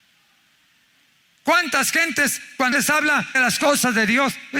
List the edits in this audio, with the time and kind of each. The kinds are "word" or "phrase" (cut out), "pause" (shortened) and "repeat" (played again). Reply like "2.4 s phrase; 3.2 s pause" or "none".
2.7 s word; 3.3 s word